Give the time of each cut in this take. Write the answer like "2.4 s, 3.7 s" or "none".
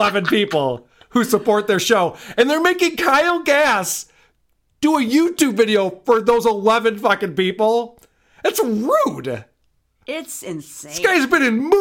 none

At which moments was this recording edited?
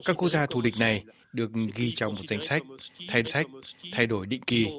3.2 s

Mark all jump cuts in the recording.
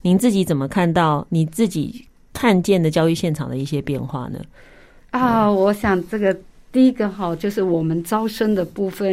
none

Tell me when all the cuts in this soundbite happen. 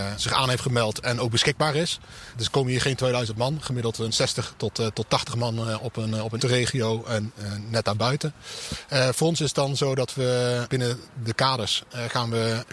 4.1 s, 6.4 s

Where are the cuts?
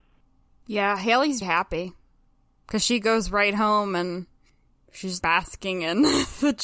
1.4 s, 5.2 s

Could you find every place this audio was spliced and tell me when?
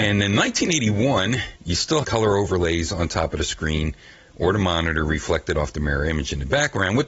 1.6 s, 2.0 s

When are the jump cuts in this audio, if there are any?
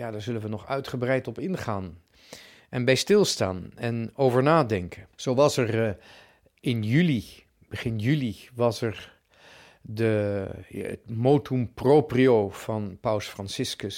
5.1 s

